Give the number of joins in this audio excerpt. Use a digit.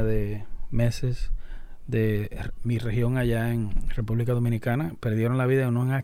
1